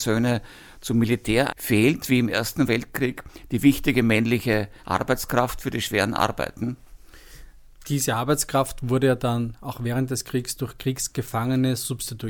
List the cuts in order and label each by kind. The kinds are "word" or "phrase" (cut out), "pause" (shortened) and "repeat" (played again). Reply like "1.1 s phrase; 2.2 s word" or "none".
1.5 s word; 4.8 s pause